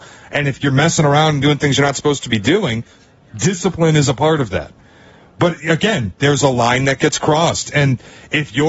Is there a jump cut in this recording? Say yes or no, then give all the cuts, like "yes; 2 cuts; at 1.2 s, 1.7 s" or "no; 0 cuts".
no; 0 cuts